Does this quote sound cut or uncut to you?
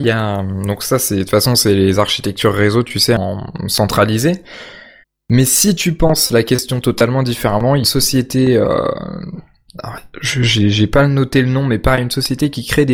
cut